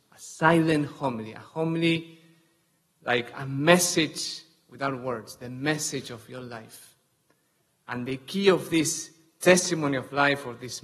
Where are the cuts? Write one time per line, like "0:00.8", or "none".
none